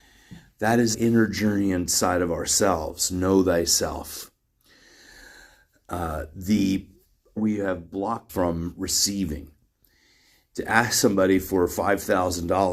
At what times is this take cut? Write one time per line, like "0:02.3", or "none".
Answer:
0:00.9
0:07.4
0:08.3